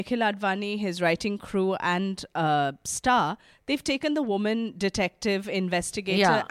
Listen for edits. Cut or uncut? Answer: uncut